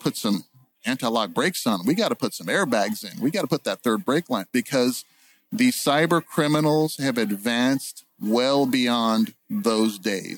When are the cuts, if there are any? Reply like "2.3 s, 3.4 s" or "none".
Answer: none